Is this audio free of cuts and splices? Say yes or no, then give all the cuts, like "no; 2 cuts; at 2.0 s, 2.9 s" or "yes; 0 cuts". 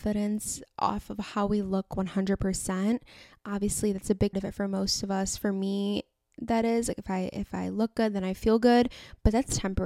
no; 1 cut; at 4.3 s